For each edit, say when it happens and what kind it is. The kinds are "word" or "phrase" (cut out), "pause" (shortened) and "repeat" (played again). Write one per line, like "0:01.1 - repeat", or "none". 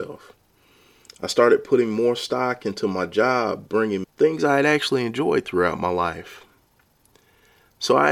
0:04.0 - phrase